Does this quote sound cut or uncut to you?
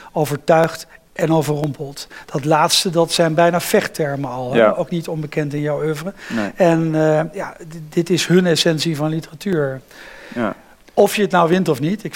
uncut